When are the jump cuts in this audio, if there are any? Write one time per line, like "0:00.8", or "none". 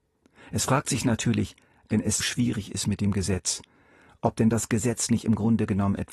0:02.2